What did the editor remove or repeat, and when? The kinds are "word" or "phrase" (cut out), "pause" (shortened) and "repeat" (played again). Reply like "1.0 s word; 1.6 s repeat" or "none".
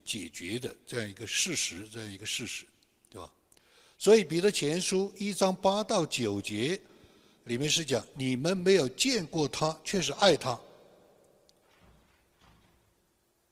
none